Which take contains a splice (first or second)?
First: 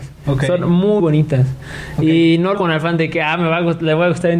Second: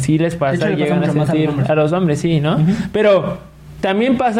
first